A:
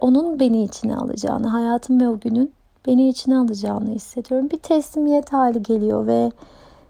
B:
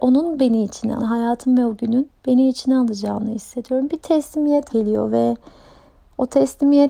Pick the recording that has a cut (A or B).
B